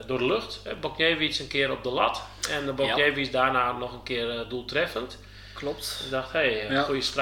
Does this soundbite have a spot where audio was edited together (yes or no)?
no